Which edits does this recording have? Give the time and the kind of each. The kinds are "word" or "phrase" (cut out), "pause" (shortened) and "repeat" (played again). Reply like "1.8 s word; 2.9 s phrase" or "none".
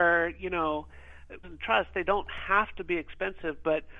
1.4 s word